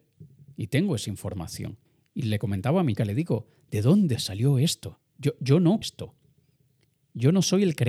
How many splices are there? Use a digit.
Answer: 4